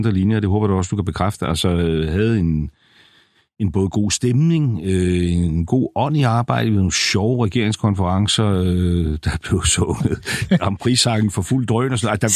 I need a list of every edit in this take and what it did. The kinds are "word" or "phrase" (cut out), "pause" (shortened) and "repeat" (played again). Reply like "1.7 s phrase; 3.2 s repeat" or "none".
none